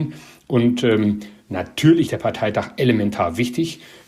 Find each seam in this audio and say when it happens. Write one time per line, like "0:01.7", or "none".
0:02.1